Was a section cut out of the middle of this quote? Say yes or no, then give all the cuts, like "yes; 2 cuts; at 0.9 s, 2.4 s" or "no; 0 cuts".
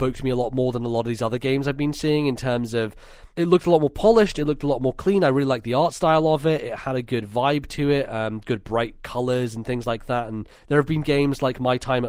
yes; 2 cuts; at 3.3 s, 10.6 s